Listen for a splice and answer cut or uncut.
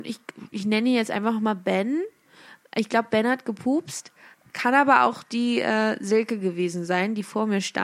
uncut